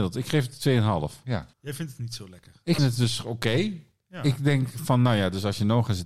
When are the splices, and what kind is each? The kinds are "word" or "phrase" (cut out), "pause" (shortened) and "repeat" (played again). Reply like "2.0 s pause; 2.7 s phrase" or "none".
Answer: 1.5 s pause; 2.8 s word